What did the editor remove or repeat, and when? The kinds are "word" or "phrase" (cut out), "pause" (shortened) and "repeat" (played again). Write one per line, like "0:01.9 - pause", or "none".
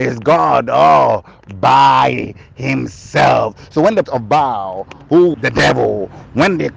0:04.0 - word
0:05.3 - word